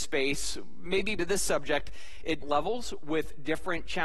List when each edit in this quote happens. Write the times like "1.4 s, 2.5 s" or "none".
1.2 s, 2.4 s